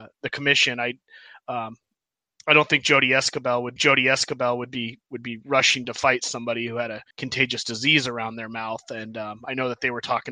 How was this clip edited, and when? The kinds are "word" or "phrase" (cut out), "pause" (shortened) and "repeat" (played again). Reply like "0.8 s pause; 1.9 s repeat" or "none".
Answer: 3.8 s repeat; 7.1 s pause

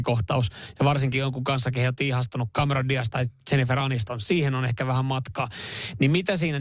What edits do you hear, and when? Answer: none

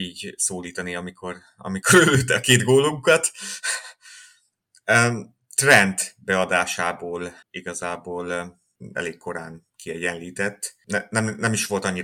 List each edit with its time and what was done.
7.4 s pause

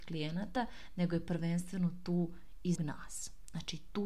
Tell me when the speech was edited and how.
2.8 s word

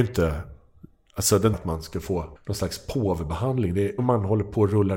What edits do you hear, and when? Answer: 1.5 s phrase; 2.4 s pause; 4.0 s phrase

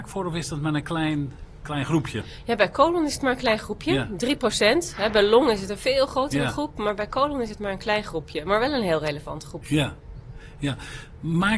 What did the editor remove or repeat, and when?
none

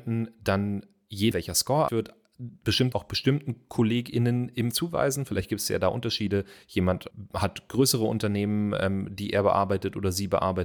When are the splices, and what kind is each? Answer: 1.3 s word; 1.9 s word; 2.9 s word; 4.7 s word

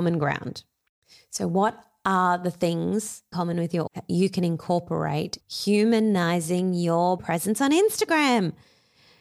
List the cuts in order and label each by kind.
3.3 s phrase; 3.9 s word; 5.4 s word; 7.2 s word

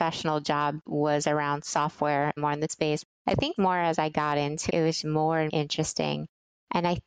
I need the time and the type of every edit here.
2.4 s word; 2.7 s word; 3.6 s word; 4.7 s word; 5.0 s word; 5.5 s word

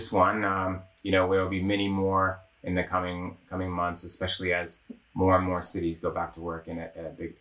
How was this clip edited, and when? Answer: none

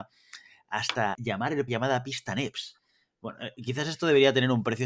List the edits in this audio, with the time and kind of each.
1.1 s word; 1.7 s word

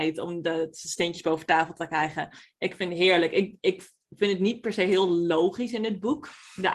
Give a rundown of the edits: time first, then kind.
none

